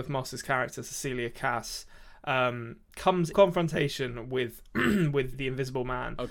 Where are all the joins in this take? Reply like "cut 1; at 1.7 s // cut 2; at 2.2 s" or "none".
cut 1; at 3.3 s // cut 2; at 5.3 s